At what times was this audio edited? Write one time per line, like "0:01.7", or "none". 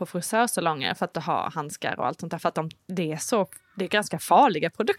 0:01.1
0:02.8